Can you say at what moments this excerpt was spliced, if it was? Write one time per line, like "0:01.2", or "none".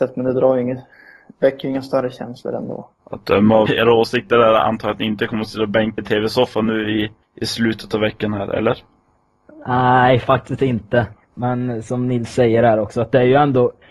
0:03.0
0:03.7
0:06.0